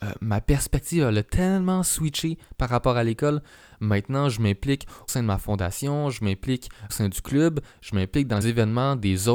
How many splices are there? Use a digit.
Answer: 3